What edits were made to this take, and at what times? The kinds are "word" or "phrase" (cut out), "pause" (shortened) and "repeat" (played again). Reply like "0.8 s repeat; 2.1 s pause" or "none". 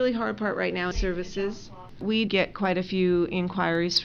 0.9 s phrase; 2.3 s word